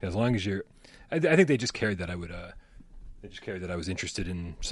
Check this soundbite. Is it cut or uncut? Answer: uncut